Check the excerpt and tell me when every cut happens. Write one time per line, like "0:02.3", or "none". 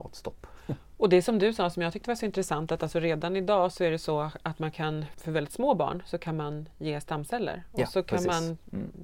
0:05.1